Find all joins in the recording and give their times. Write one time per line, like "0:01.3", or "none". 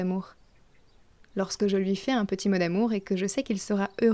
none